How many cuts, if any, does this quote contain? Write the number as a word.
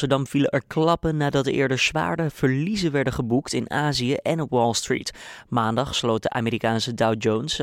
zero